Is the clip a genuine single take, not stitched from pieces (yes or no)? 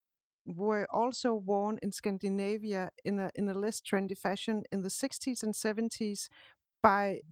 yes